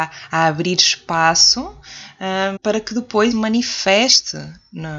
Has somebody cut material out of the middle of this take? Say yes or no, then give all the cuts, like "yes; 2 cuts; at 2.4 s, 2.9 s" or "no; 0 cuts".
yes; 2 cuts; at 2.6 s, 3.3 s